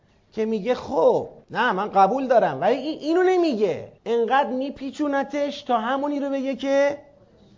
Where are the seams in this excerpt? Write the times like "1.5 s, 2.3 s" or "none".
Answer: 1.4 s, 4.0 s